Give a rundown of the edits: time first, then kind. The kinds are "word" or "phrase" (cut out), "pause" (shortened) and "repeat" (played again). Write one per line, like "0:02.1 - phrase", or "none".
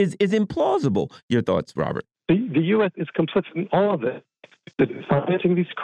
0:02.1 - pause
0:04.7 - pause